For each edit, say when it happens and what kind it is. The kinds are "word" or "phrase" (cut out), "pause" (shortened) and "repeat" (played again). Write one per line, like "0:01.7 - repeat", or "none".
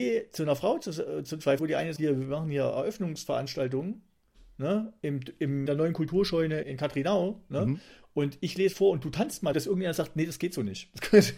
0:01.6 - word
0:02.0 - word
0:05.7 - word
0:06.6 - word
0:08.7 - word
0:09.5 - word